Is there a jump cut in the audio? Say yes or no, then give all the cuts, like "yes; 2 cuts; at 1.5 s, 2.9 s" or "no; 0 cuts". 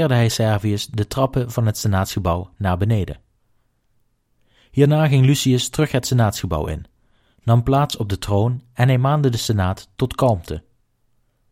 no; 0 cuts